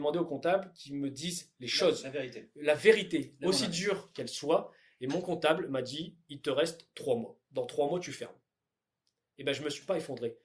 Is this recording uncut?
no; 1 cut; at 7.4 s

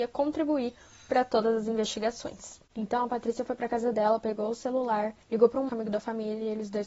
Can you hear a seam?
yes; 2 cuts; at 5.2 s, 5.7 s

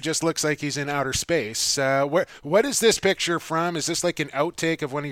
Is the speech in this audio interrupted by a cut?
no; 0 cuts

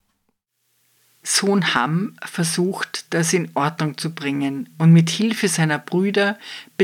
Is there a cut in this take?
no; 0 cuts

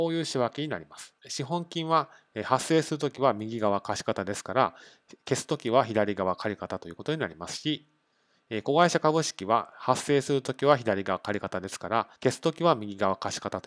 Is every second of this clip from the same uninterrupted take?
no; 2 cuts; at 1.2 s, 12.2 s

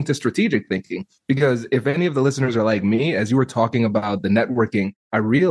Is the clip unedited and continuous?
yes; 0 cuts

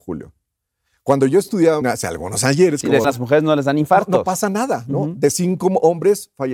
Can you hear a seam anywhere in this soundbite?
yes; 2 cuts; at 1.8 s, 3.0 s

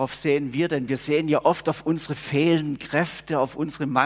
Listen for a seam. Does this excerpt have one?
no; 0 cuts

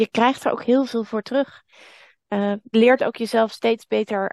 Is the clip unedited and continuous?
no; 1 cut; at 2.7 s

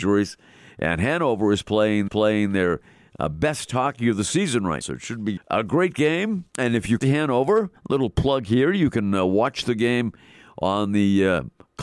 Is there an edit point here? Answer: yes; 6 cuts; at 2.1 s, 4.8 s, 5.4 s, 6.5 s, 7.0 s, 7.8 s

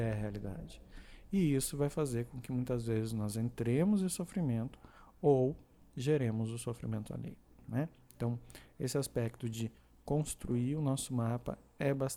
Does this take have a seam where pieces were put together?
no; 0 cuts

